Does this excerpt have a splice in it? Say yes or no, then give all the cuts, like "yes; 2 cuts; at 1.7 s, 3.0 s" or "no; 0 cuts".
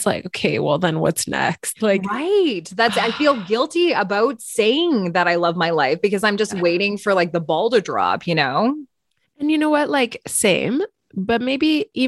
no; 0 cuts